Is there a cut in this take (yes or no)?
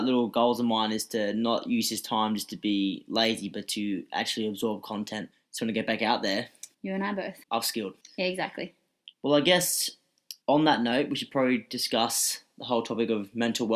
yes